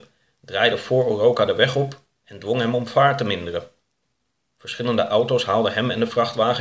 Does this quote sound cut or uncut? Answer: uncut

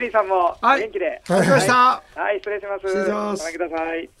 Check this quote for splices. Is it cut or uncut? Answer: cut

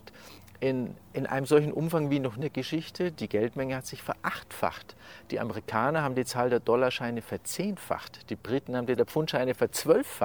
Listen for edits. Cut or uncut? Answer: cut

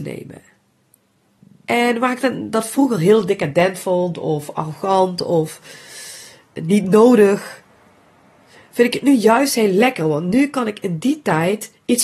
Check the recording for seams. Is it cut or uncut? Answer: uncut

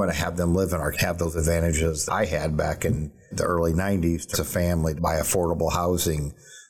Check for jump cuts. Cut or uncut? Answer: cut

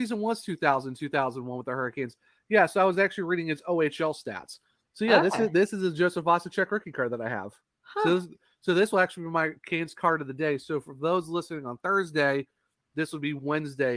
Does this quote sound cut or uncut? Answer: uncut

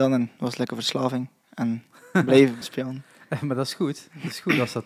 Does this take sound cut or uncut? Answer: cut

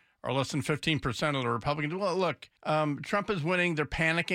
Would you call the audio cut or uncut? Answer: cut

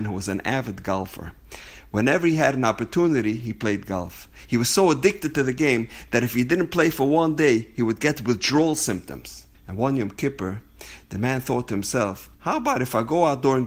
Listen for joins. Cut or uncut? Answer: cut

